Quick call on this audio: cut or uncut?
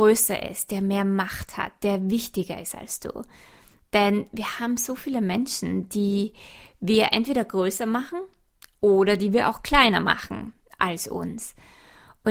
uncut